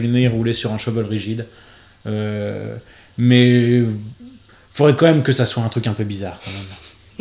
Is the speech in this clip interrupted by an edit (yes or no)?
no